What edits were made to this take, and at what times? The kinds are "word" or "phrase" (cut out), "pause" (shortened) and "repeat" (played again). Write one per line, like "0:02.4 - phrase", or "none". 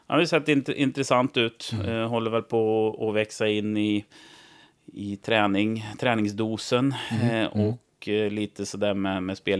none